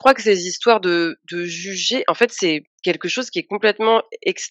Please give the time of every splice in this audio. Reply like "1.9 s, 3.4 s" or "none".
2.7 s

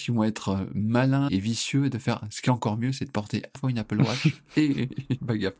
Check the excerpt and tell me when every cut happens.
1.3 s, 3.5 s

